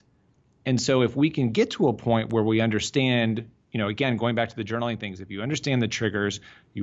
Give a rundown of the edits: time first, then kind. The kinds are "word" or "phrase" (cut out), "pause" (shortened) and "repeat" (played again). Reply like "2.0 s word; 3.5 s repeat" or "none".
none